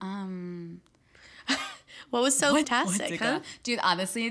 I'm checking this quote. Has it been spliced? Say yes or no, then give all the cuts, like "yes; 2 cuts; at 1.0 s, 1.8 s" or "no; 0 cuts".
yes; 1 cut; at 2.6 s